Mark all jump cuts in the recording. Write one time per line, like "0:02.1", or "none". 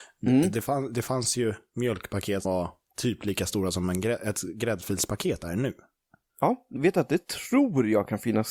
0:02.4
0:06.8